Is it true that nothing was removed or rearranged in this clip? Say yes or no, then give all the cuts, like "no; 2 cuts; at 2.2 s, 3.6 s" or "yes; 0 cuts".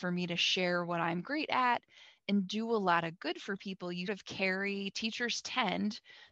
no; 1 cut; at 4.1 s